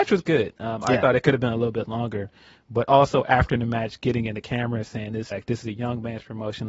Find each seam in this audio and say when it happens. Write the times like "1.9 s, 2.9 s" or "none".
5.3 s

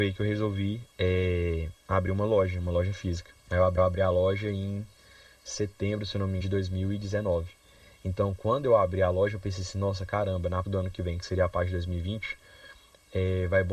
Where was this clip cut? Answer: 1.8 s, 3.4 s, 3.8 s, 6.4 s, 10.6 s

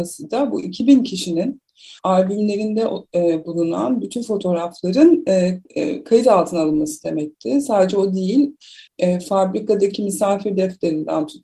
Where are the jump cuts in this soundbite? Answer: 2.0 s, 5.6 s, 8.9 s

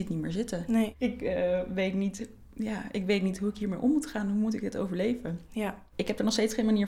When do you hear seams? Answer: none

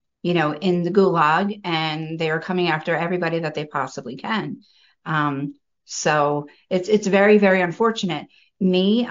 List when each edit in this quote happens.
none

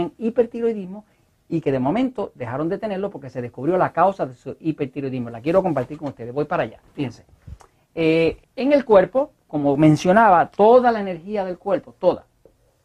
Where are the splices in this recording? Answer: 8.4 s

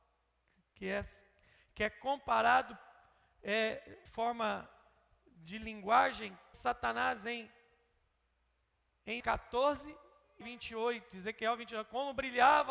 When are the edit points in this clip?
4.1 s, 6.5 s, 9.2 s, 10.4 s

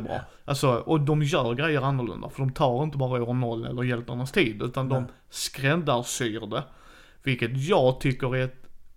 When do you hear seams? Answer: none

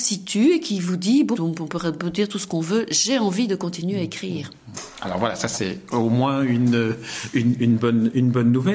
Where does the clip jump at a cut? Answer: 1.3 s

